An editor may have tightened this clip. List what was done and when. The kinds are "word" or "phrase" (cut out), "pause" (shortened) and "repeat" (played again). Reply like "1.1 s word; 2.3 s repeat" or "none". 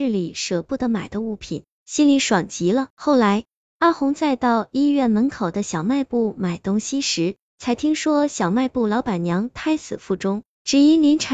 2.9 s pause